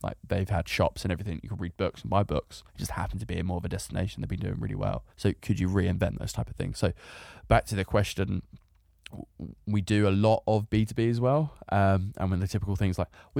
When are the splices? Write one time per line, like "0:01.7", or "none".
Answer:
0:02.7
0:05.1